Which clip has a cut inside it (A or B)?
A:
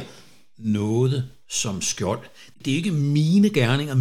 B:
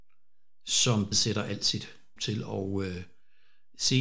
B